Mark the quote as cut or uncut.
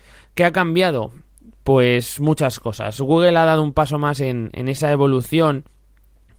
uncut